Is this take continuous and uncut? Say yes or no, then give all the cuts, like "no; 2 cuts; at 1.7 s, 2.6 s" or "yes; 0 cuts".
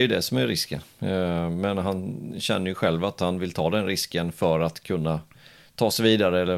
yes; 0 cuts